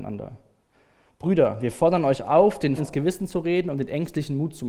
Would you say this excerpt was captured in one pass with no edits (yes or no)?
no